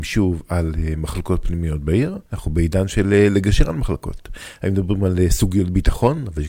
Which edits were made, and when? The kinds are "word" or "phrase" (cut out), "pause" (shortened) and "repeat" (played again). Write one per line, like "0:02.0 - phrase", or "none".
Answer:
0:02.3 - pause